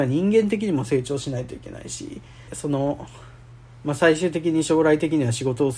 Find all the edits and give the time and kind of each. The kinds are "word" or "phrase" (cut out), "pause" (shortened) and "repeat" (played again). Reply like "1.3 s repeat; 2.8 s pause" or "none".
2.5 s word